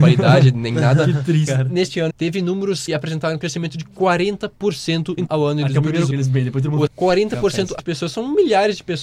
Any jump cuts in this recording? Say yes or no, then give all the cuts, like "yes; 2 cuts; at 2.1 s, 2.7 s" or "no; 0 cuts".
yes; 8 cuts; at 1.5 s, 2.1 s, 2.9 s, 3.4 s, 5.3 s, 6.1 s, 6.9 s, 7.8 s